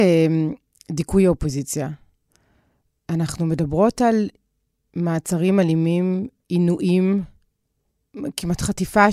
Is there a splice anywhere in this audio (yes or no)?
no